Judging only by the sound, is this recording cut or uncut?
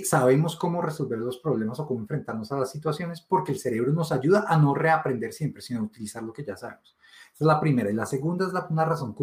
uncut